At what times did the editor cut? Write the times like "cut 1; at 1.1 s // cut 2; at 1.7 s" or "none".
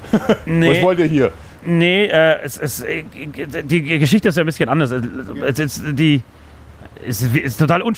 none